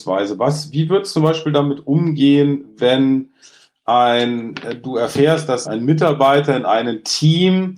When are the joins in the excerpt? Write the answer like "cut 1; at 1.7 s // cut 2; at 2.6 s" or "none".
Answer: cut 1; at 1.1 s // cut 2; at 5.6 s

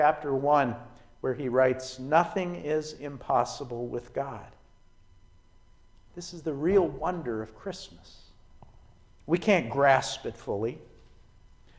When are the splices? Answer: none

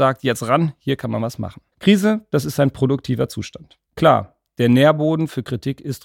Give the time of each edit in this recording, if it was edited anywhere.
cut 1; at 1.7 s // cut 2; at 3.8 s

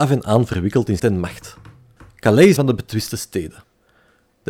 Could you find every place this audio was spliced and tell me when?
cut 1; at 1.0 s // cut 2; at 2.6 s

